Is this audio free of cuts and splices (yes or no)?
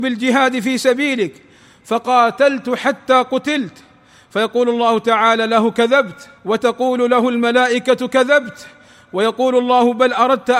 no